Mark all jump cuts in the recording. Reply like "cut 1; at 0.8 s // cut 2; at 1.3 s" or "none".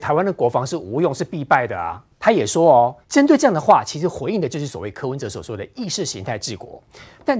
cut 1; at 2.1 s // cut 2; at 3.0 s